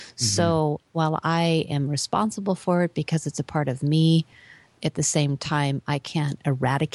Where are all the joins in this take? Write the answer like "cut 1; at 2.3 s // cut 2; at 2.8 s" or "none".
none